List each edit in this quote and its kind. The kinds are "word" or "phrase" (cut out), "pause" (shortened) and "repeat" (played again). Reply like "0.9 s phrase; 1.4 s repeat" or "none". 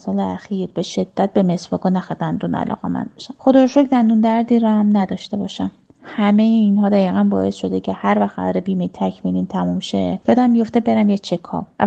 none